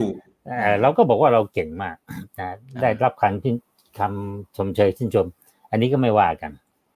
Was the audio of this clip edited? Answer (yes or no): no